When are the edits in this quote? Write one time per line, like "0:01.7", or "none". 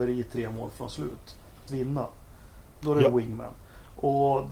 0:01.7